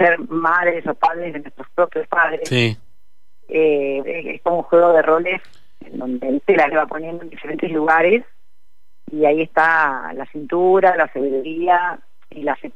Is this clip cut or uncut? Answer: cut